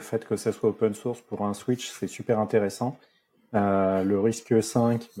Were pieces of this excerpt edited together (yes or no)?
no